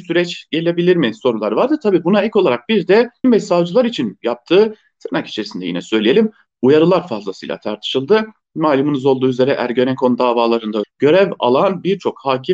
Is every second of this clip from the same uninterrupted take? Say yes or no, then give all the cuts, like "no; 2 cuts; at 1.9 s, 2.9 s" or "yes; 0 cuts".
no; 2 cuts; at 3.2 s, 10.8 s